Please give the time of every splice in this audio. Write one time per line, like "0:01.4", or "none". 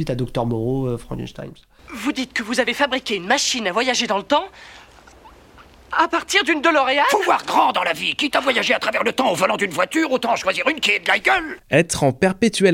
none